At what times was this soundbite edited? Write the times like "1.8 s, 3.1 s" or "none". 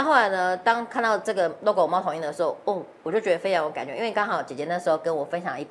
none